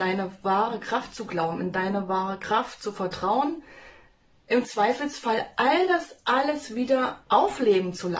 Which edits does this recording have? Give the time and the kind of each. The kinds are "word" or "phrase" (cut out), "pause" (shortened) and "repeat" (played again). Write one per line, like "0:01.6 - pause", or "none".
none